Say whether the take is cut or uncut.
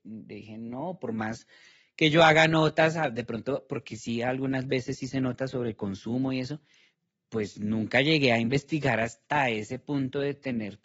uncut